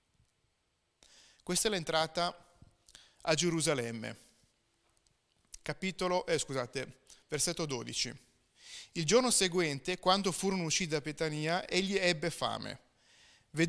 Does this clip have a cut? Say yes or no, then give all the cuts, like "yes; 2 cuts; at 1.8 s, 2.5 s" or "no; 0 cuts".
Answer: no; 0 cuts